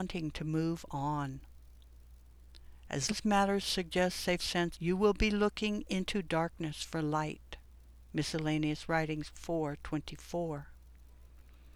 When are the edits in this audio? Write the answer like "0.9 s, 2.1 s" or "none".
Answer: 3.1 s, 4.4 s, 4.7 s, 9.3 s